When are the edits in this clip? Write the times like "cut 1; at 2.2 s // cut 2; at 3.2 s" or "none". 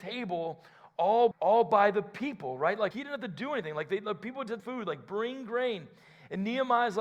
cut 1; at 1.3 s // cut 2; at 2.9 s // cut 3; at 4.6 s